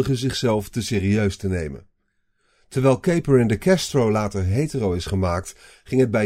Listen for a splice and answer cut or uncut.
uncut